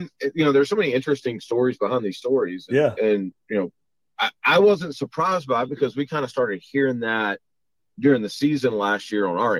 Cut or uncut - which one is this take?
uncut